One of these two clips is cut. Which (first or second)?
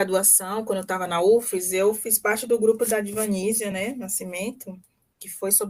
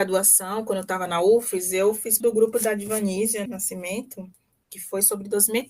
second